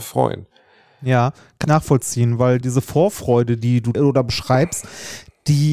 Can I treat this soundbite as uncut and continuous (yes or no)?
no